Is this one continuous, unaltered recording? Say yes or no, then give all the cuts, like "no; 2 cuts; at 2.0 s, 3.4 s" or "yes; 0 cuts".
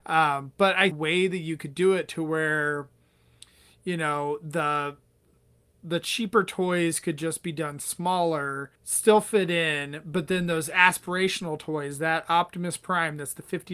no; 2 cuts; at 0.9 s, 8.7 s